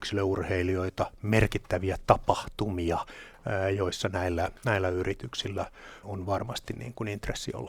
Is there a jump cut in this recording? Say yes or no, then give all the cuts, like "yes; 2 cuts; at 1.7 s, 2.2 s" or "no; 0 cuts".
yes; 1 cut; at 6.0 s